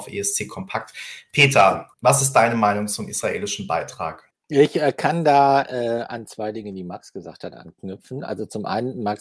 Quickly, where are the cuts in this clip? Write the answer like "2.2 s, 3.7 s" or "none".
1.9 s, 4.3 s

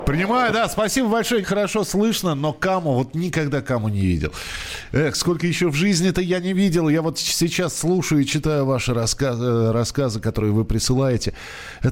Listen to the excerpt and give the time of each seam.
1.4 s

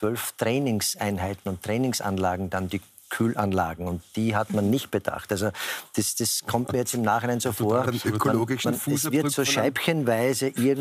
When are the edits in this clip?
none

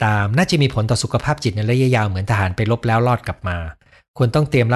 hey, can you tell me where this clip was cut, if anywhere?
none

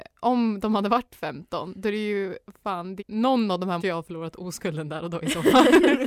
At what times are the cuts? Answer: 3.0 s, 3.8 s

